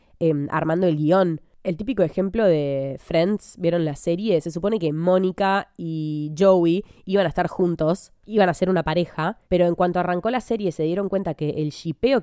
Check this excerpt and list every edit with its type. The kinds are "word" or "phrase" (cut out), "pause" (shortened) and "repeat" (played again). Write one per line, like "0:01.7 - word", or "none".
0:09.4 - pause